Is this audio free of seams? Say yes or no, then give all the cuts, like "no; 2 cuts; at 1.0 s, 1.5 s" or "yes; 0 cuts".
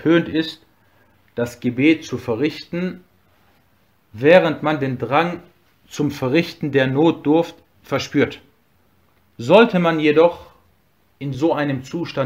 yes; 0 cuts